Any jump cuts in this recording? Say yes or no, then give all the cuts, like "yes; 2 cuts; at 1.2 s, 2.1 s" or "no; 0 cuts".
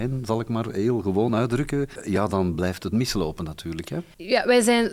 no; 0 cuts